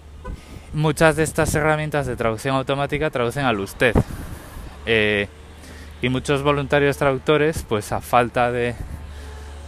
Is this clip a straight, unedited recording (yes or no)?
yes